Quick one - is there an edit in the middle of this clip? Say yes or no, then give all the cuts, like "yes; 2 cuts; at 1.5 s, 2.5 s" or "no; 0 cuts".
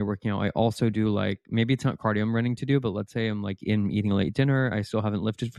no; 0 cuts